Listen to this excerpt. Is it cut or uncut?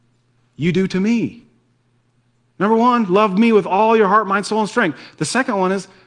uncut